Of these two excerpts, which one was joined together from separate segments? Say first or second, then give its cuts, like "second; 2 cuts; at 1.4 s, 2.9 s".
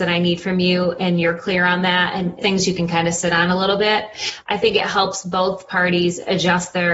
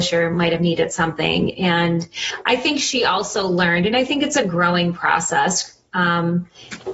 first; 1 cut; at 2.4 s